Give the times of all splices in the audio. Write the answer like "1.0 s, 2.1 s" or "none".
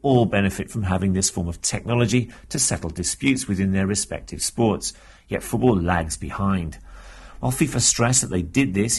none